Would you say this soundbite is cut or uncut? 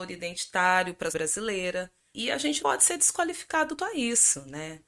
cut